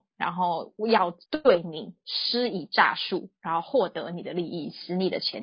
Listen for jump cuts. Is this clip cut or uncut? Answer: cut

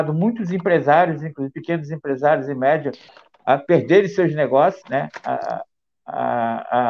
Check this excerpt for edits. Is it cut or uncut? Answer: cut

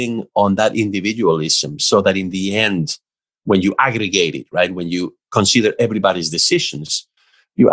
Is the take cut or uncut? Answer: uncut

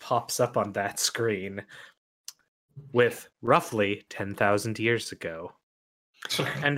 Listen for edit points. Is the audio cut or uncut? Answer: cut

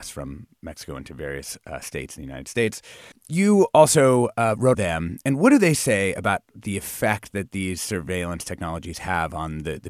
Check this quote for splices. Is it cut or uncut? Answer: cut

